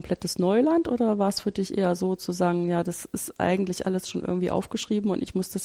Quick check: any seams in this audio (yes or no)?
no